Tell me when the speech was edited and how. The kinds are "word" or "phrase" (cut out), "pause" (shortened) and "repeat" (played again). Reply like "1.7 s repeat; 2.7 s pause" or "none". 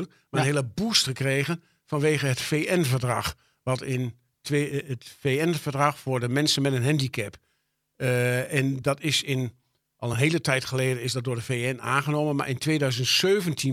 none